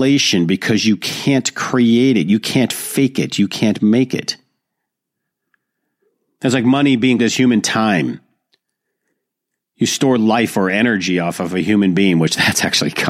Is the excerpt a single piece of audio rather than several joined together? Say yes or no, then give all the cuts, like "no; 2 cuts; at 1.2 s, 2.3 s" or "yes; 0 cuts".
no; 1 cut; at 7.2 s